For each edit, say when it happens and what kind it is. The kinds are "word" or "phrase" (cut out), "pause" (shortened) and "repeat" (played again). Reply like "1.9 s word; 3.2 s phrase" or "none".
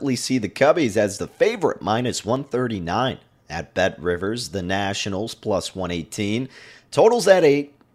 none